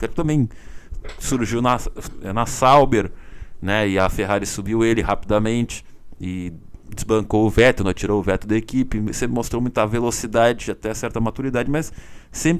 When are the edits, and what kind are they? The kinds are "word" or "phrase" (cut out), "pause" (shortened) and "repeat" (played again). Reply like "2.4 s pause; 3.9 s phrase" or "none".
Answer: none